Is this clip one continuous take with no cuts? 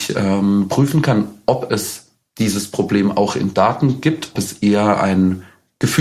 no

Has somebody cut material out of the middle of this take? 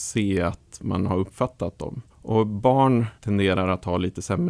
yes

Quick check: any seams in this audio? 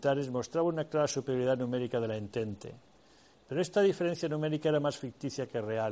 no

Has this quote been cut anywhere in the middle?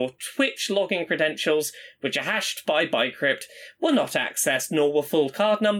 no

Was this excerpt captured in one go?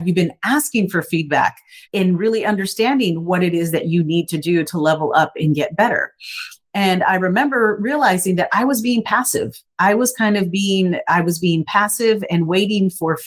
no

